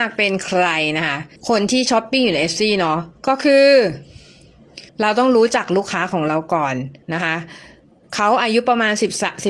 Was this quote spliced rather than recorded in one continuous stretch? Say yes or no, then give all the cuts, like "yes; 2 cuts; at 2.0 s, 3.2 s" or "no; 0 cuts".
yes; 4 cuts; at 1.4 s, 3.2 s, 4.9 s, 7.0 s